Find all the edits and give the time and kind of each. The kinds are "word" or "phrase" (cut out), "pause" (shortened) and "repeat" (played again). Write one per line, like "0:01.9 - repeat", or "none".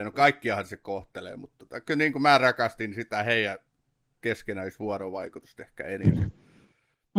none